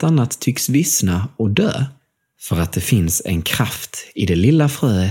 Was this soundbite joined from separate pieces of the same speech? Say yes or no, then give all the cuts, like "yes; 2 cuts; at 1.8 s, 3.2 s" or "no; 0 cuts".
no; 0 cuts